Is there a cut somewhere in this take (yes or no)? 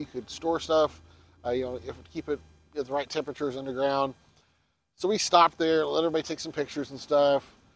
no